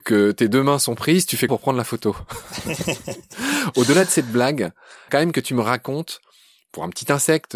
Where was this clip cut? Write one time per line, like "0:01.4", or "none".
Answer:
0:01.5
0:05.1